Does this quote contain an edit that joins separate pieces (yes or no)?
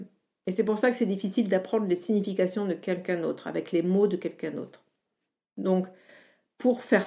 no